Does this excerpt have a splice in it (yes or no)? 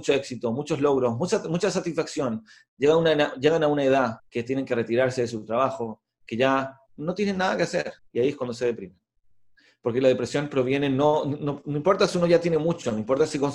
yes